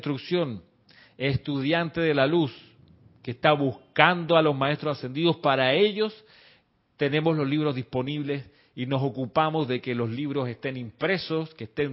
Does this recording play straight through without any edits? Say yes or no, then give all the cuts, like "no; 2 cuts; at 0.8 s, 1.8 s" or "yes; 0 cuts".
yes; 0 cuts